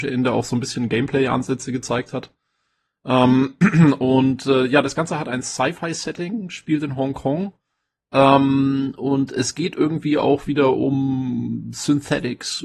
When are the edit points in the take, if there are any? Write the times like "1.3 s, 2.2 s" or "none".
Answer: none